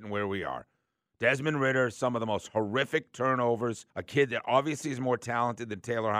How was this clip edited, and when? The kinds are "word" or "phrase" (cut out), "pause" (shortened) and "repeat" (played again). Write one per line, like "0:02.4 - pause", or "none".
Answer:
0:03.9 - pause

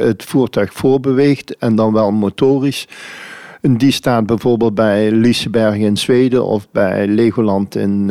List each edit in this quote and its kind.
none

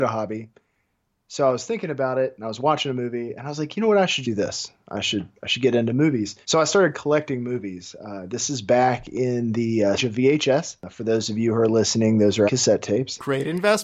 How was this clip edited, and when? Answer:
0:04.2 - word
0:05.4 - pause
0:06.4 - pause
0:10.0 - phrase
0:12.5 - word

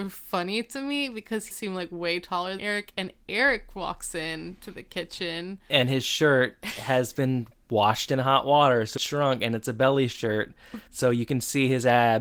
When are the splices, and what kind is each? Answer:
0:01.5 - phrase
0:02.6 - word
0:09.0 - word
0:10.9 - pause

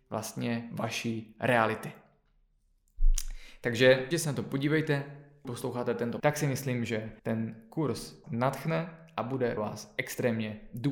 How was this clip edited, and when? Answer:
0:04.1 - word
0:05.4 - word
0:06.2 - word
0:07.2 - pause
0:08.2 - word
0:09.6 - word

